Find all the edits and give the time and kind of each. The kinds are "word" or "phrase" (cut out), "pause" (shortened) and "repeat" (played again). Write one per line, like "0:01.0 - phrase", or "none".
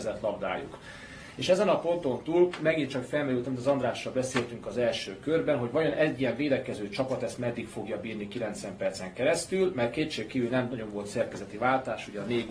none

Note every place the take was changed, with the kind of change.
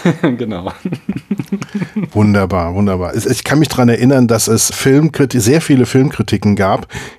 0:04.7 - word

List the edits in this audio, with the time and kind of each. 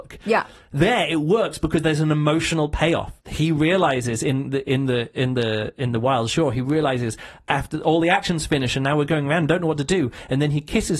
0:03.2 - pause

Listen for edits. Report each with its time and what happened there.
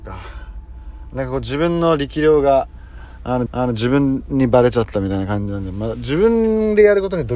0:03.5 - repeat

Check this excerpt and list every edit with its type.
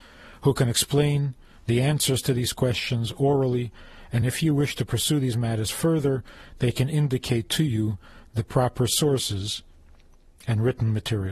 none

